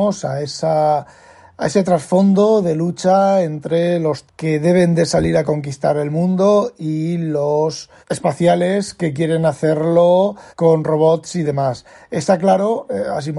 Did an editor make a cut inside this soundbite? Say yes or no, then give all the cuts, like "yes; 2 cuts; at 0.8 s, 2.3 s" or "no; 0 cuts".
yes; 3 cuts; at 4.3 s, 8.0 s, 10.5 s